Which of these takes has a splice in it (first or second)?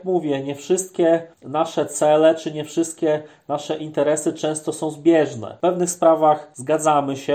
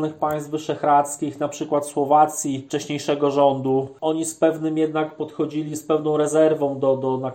first